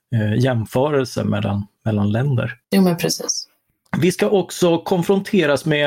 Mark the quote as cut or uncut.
cut